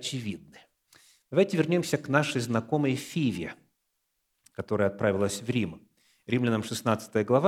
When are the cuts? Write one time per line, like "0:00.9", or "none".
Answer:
none